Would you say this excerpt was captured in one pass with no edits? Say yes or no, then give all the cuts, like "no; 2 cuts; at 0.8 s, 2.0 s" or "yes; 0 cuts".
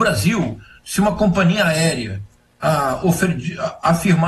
yes; 0 cuts